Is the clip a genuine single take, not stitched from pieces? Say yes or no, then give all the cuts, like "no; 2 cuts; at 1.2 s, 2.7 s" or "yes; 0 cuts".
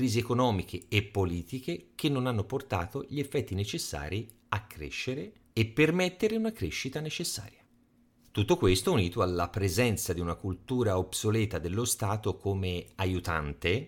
yes; 0 cuts